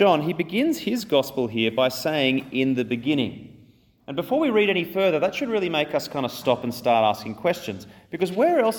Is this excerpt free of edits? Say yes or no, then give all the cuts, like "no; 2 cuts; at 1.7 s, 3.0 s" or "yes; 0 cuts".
yes; 0 cuts